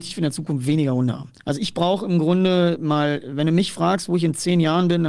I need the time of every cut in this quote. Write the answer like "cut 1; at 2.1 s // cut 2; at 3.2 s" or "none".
cut 1; at 1.4 s